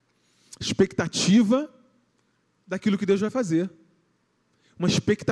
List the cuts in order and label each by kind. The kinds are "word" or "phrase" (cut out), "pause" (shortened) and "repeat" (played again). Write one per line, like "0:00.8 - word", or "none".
none